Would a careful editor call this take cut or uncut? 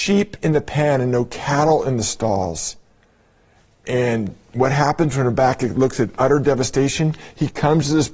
uncut